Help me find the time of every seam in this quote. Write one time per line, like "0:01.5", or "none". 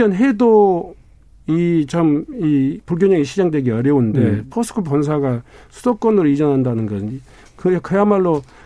none